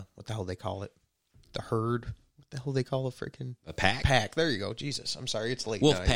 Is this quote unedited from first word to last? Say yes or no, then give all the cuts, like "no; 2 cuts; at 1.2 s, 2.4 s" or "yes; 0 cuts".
yes; 0 cuts